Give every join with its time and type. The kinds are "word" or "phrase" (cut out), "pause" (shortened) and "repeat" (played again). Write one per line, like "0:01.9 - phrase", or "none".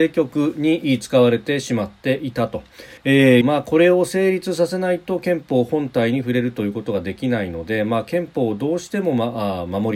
0:03.0 - pause
0:03.4 - phrase